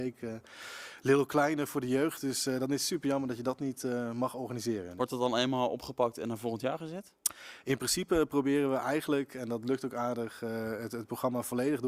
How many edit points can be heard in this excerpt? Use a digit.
0